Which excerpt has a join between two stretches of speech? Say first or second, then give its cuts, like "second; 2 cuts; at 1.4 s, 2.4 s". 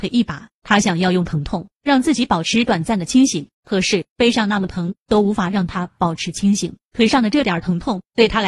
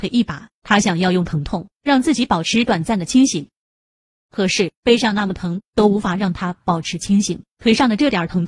first; 1 cut; at 3.5 s